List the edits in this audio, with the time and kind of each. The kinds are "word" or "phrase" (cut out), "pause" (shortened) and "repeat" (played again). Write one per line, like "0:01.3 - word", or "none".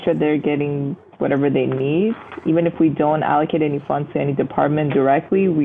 none